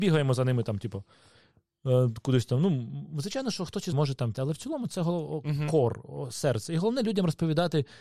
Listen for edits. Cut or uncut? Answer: cut